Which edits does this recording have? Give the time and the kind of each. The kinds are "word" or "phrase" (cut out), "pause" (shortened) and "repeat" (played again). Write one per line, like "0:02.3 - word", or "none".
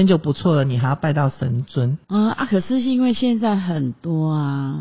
0:02.0 - pause

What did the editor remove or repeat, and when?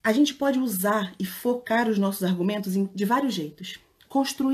none

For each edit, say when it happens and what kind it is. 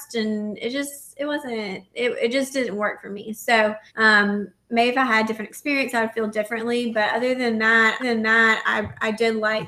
0:03.9 - pause
0:08.0 - repeat

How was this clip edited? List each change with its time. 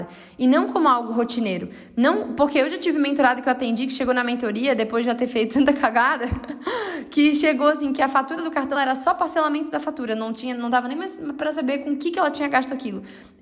0:08.8 - word

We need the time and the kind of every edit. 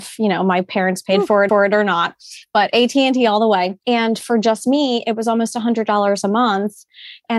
0:01.5 - repeat
0:03.8 - pause

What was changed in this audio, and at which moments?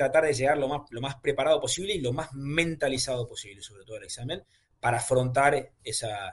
none

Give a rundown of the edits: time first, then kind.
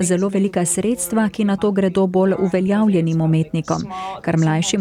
none

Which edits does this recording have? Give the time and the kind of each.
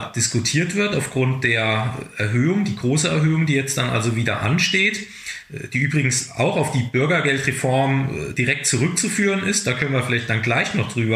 none

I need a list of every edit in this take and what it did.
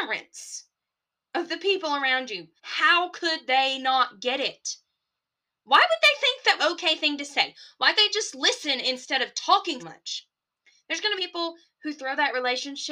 0:02.6 - pause
0:06.6 - phrase
0:07.9 - word
0:09.8 - word
0:11.2 - phrase

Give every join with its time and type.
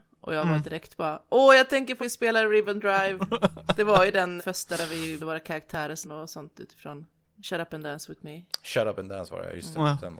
0:02.0 - word
0:04.4 - word
0:05.2 - word
0:06.0 - word
0:07.2 - pause

